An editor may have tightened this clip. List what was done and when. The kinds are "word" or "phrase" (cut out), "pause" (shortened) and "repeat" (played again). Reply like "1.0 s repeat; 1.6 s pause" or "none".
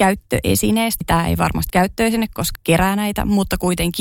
1.0 s word; 1.7 s word; 2.6 s word

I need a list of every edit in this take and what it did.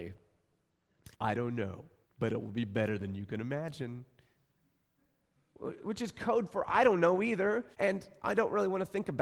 1.1 s pause; 2.0 s pause; 7.7 s pause

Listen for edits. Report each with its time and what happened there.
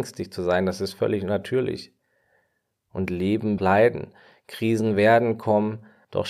3.6 s phrase

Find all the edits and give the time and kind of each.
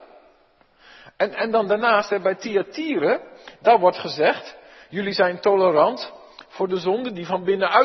none

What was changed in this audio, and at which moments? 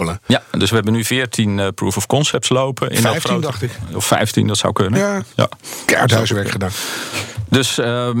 5.3 s pause

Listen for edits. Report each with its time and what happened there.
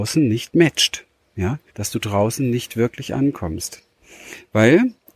1.7 s pause

